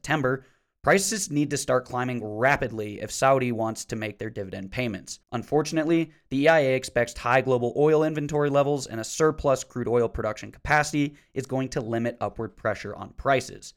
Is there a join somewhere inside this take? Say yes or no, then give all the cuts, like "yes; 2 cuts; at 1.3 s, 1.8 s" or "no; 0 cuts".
yes; 1 cut; at 5.2 s